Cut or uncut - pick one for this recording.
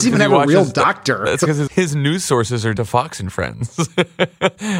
cut